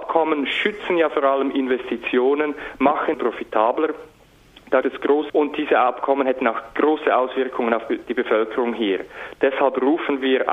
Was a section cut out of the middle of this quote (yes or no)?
yes